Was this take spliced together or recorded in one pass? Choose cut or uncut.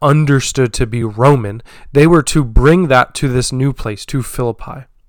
uncut